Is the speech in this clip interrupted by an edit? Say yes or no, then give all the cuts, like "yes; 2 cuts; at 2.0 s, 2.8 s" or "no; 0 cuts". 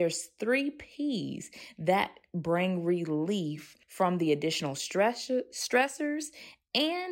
yes; 1 cut; at 3.8 s